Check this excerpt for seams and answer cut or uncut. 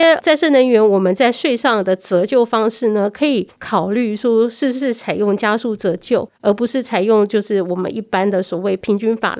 cut